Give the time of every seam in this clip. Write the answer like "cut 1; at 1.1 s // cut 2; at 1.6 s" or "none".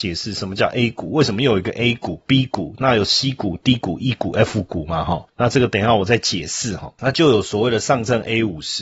none